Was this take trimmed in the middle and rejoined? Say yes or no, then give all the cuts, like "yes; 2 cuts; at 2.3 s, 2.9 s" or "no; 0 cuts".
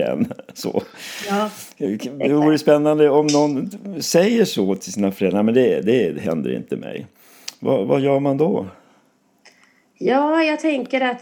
no; 0 cuts